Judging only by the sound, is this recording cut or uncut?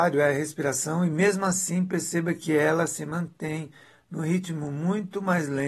uncut